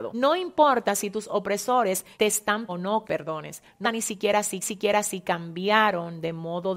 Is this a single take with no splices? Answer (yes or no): no